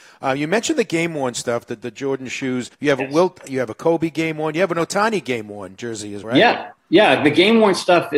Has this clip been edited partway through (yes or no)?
yes